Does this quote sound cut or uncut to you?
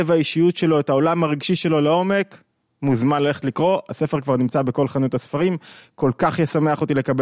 uncut